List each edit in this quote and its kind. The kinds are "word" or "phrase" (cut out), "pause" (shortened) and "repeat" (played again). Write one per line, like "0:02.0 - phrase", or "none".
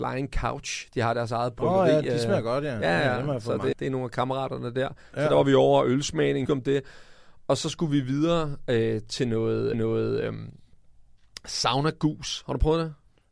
0:03.7 - word
0:06.5 - word
0:09.7 - repeat